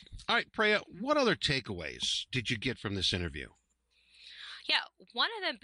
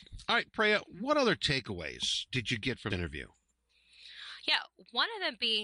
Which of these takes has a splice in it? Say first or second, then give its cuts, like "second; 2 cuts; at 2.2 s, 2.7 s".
second; 1 cut; at 2.9 s